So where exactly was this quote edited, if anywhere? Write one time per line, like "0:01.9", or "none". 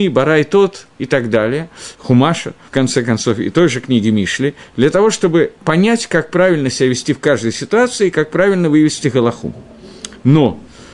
0:01.9
0:02.7

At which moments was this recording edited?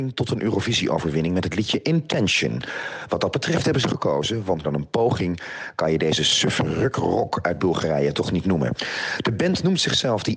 0:03.8
0:04.6

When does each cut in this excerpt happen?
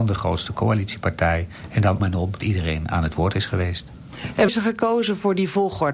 0:02.0
0:02.4
0:04.5

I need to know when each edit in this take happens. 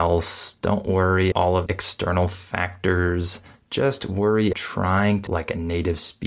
0:01.3
0:01.7
0:04.5
0:05.3

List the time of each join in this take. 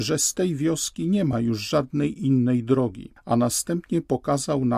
none

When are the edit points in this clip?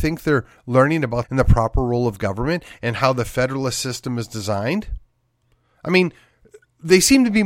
0:01.2

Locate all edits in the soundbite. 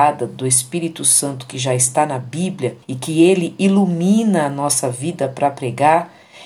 0:02.8

